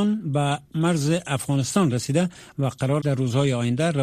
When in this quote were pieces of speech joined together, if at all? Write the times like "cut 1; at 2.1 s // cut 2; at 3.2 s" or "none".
cut 1; at 3.0 s